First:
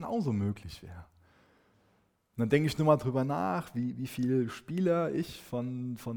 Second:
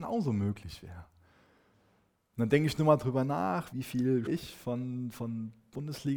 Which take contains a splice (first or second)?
second